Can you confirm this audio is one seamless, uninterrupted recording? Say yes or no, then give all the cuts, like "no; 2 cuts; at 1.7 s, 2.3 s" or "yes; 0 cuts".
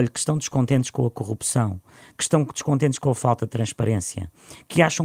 yes; 0 cuts